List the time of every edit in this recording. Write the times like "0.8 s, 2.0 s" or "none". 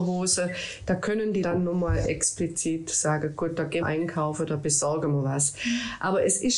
1.4 s, 3.8 s